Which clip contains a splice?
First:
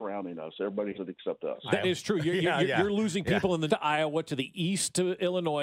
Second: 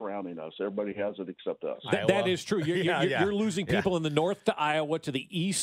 first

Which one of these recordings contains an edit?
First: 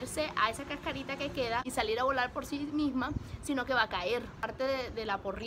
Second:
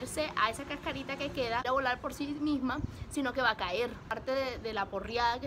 second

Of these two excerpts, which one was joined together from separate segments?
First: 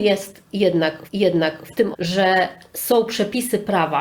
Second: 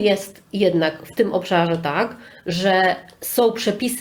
first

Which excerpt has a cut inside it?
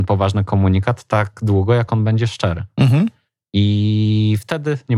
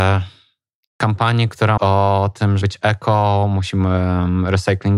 second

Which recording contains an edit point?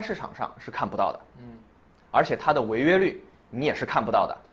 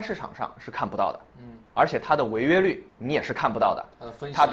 second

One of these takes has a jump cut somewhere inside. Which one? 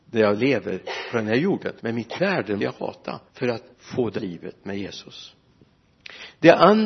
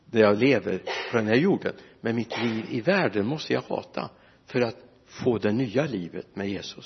first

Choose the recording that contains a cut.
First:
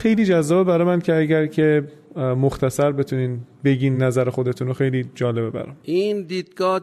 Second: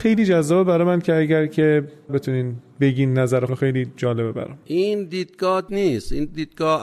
second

